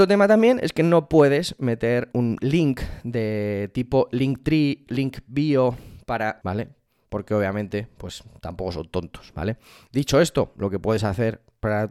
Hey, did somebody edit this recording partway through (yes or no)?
yes